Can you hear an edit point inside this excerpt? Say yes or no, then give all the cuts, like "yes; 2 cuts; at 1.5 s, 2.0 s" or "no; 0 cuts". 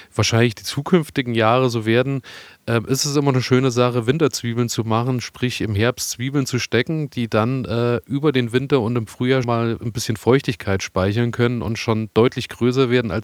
yes; 1 cut; at 9.4 s